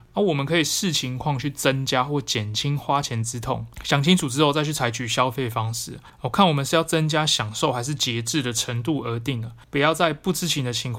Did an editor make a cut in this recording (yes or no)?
yes